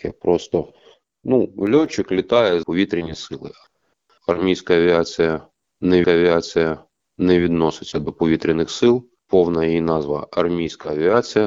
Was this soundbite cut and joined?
yes; 3 cuts; at 2.6 s, 6.0 s, 9.2 s

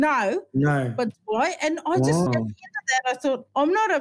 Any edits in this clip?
yes; 2 cuts; at 1.1 s, 2.3 s

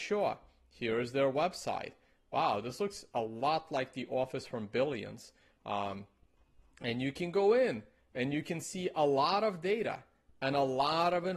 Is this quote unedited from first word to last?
yes; 0 cuts

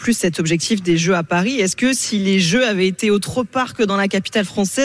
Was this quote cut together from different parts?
no; 0 cuts

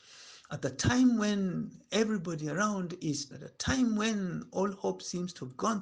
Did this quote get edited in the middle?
yes; 1 cut; at 3.3 s

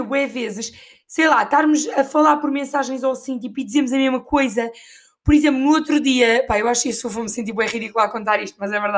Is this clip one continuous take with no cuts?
yes; 0 cuts

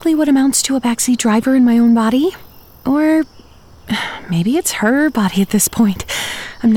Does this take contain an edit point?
no; 0 cuts

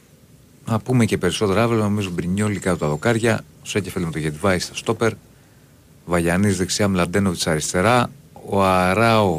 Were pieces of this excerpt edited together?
no; 0 cuts

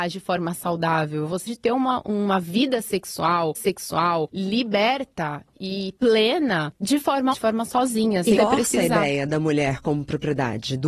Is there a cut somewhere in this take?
yes; 5 cuts; at 1.5 s, 3.5 s, 6.0 s, 7.3 s, 8.4 s

